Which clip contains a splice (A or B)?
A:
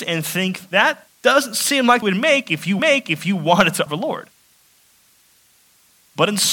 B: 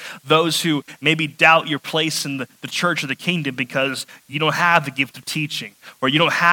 A